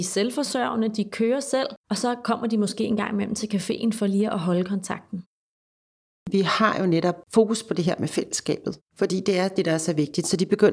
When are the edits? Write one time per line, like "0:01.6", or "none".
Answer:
0:01.8
0:08.8